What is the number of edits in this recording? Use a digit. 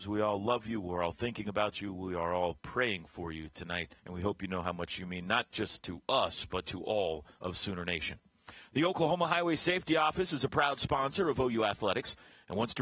2